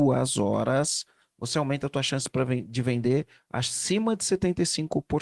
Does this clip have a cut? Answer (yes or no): no